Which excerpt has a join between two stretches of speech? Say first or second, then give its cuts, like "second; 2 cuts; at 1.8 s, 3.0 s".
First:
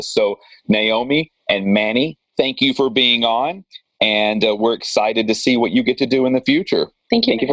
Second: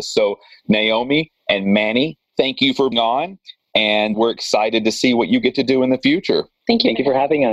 second; 2 cuts; at 2.9 s, 4.1 s